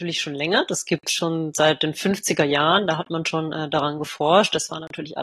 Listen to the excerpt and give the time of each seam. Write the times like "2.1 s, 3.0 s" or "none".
none